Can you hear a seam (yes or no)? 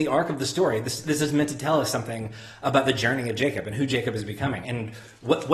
yes